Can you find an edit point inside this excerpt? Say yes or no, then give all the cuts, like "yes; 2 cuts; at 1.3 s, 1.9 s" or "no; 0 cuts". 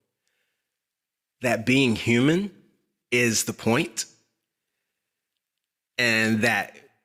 no; 0 cuts